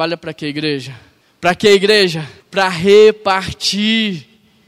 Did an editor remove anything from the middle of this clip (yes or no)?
yes